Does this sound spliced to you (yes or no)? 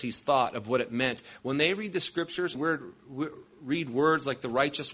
yes